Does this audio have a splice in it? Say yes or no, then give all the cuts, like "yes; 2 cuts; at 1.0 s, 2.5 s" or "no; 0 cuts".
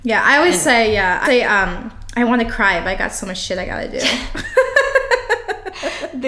yes; 1 cut; at 1.2 s